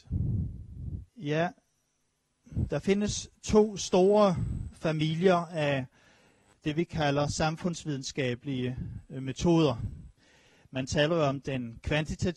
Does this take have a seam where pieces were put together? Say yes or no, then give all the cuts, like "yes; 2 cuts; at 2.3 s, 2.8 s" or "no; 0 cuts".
yes; 1 cut; at 1.1 s